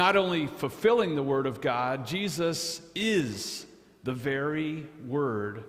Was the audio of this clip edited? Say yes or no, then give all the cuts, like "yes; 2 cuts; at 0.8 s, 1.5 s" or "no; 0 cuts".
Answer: no; 0 cuts